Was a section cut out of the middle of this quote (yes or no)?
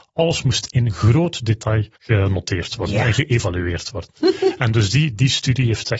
yes